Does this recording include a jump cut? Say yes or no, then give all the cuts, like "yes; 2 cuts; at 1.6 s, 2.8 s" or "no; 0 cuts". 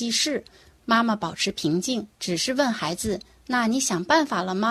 yes; 1 cut; at 2.1 s